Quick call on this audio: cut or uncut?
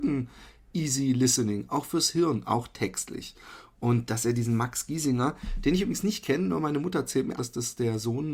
cut